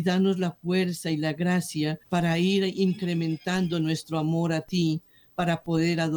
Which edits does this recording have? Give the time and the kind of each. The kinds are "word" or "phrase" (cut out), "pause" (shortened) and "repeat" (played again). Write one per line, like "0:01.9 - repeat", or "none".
0:02.0 - pause